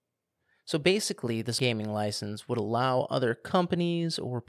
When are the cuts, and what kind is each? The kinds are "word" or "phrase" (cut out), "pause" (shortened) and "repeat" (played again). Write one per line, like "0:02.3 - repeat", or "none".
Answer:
0:01.6 - word